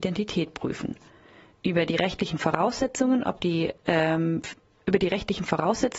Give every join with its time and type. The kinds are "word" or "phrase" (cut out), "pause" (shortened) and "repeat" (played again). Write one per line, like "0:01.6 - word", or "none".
none